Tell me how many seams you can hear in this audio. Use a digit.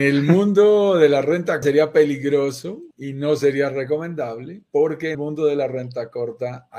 4